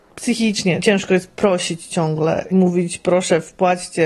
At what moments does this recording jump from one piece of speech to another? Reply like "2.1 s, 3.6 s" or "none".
2.5 s